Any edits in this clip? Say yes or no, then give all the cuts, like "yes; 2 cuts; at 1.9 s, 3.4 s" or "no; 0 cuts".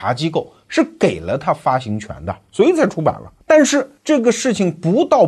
yes; 2 cuts; at 3.4 s, 4.0 s